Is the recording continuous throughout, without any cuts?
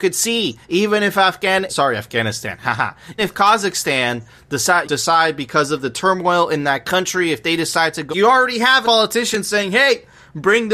no; 5 cuts; at 1.7 s, 3.2 s, 4.8 s, 8.1 s, 8.8 s

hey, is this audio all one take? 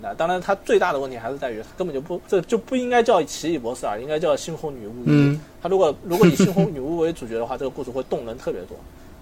no; 1 cut; at 2.2 s

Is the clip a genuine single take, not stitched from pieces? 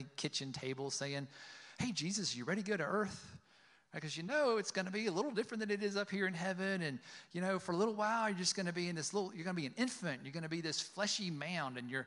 yes; 0 cuts

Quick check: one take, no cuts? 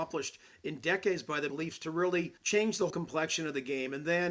no; 3 cuts; at 1.5 s, 2.4 s, 2.9 s

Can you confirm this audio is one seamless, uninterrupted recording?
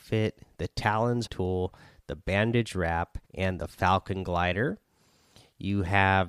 no; 2 cuts; at 1.3 s, 3.2 s

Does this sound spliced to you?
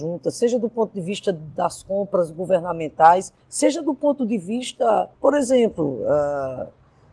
yes; 2 cuts; at 3.4 s, 5.1 s

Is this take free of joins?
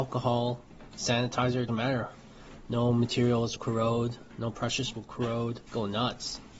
no; 4 cuts; at 1.7 s, 3.6 s, 4.9 s, 5.7 s

